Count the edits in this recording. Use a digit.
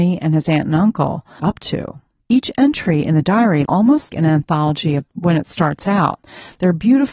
5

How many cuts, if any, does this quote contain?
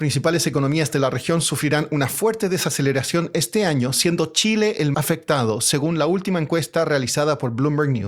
1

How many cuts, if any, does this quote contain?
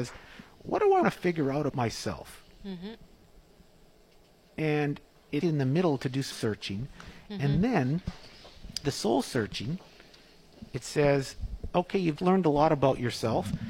6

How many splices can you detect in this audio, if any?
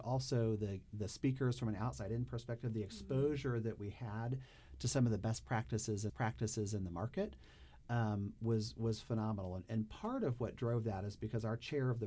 1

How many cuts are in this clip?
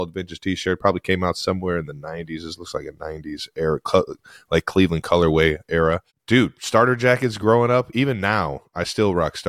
0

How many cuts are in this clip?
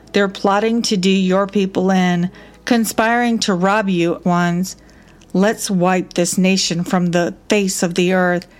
1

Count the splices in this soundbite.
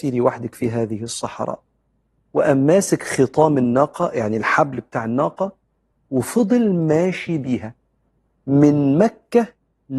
0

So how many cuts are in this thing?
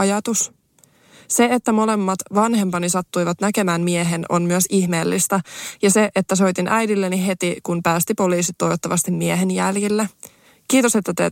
1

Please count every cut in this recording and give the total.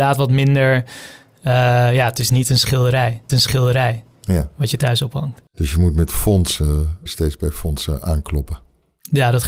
3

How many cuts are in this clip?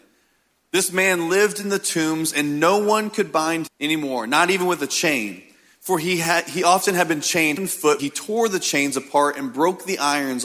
3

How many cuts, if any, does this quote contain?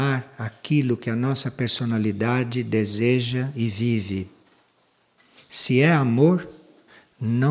0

